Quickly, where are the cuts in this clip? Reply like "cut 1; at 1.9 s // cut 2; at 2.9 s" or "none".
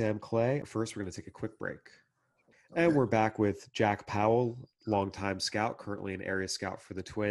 none

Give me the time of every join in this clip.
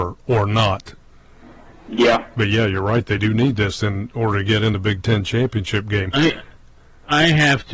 none

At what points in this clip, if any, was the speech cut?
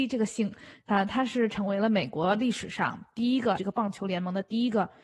cut 1; at 3.6 s

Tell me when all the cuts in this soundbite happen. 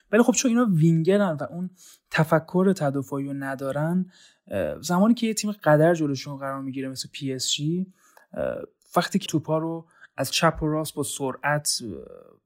cut 1; at 9.3 s

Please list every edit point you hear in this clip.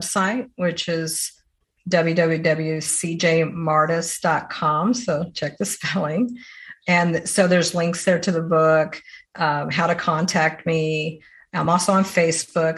none

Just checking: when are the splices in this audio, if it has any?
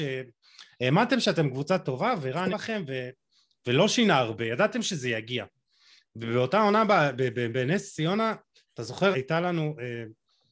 cut 1; at 2.5 s // cut 2; at 9.1 s

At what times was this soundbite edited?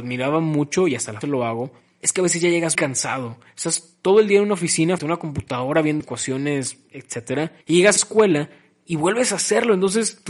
cut 1; at 1.2 s // cut 2; at 2.8 s // cut 3; at 5.0 s // cut 4; at 6.0 s // cut 5; at 7.6 s // cut 6; at 8.0 s

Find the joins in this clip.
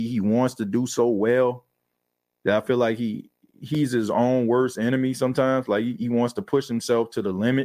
none

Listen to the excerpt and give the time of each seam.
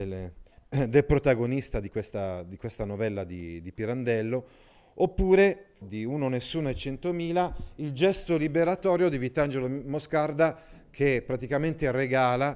cut 1; at 5.8 s

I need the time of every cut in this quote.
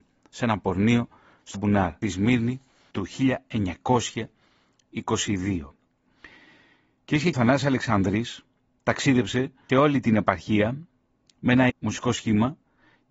cut 1; at 1.5 s // cut 2; at 2.0 s // cut 3; at 7.3 s // cut 4; at 9.7 s // cut 5; at 11.7 s

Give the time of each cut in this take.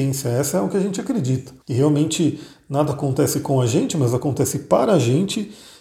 cut 1; at 1.6 s

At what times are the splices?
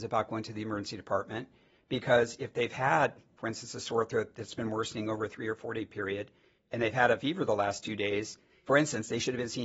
none

